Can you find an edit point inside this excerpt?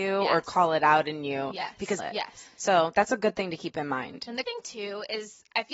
yes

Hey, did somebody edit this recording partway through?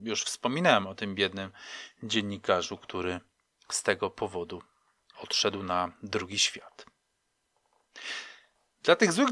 no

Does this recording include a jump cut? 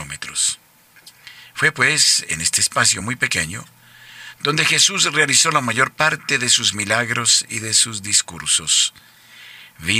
no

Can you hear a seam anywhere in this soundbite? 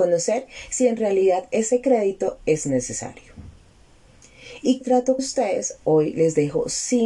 yes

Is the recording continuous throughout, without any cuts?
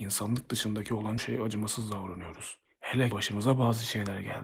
no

